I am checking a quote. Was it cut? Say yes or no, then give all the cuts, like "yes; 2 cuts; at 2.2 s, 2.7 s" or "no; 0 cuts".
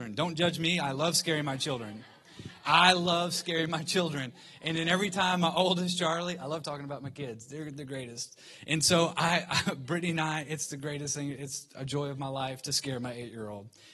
no; 0 cuts